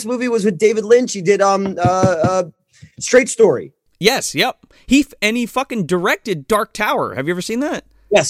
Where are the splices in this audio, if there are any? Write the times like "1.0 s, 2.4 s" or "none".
none